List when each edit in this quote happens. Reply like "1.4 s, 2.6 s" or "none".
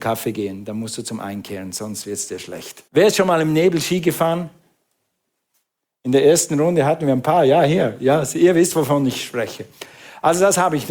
2.9 s